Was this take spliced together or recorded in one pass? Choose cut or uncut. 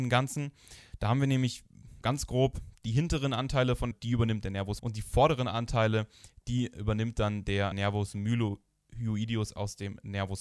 cut